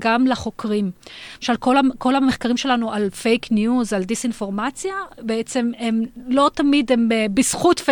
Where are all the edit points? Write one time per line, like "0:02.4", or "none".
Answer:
none